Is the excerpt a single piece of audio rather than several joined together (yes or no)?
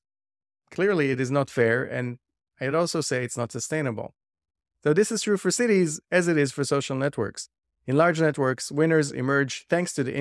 yes